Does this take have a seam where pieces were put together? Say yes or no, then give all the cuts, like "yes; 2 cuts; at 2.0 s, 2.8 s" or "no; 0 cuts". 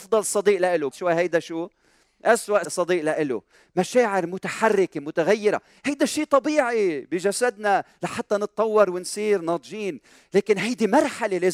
yes; 2 cuts; at 0.9 s, 2.6 s